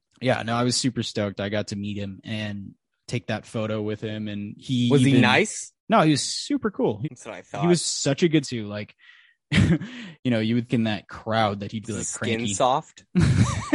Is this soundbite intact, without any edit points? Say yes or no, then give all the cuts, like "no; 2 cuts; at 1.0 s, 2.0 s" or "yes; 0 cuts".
no; 6 cuts; at 5.8 s, 7.0 s, 8.4 s, 10.2 s, 10.7 s, 11.8 s